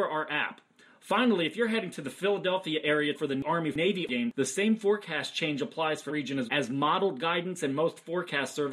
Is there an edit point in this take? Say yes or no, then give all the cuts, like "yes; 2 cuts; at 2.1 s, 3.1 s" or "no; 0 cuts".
yes; 3 cuts; at 3.1 s, 6.1 s, 6.5 s